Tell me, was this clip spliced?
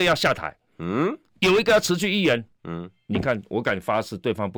no; 0 cuts

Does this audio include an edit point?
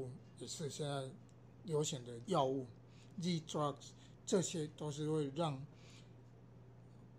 yes; 1 cut; at 2.2 s

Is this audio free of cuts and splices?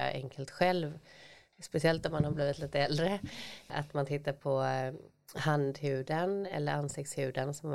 yes; 0 cuts

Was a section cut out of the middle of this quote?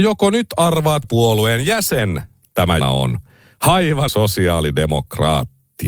yes; 3 cuts; at 1.0 s, 2.8 s, 4.1 s

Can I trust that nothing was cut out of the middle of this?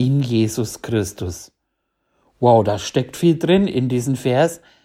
yes; 0 cuts

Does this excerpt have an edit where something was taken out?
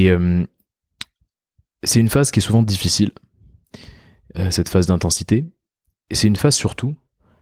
no; 0 cuts

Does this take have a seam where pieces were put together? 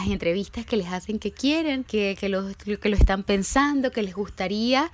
no; 0 cuts

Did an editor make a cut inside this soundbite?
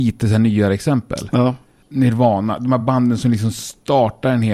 no; 0 cuts

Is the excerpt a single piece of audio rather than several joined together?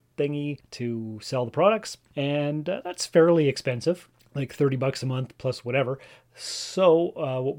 yes; 0 cuts

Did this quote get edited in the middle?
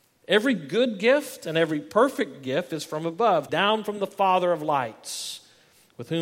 yes; 1 cut; at 3.5 s

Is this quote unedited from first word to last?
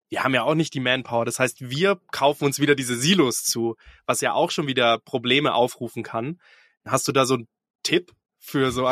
yes; 0 cuts

